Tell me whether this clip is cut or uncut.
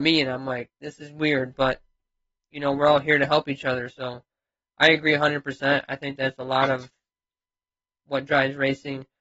uncut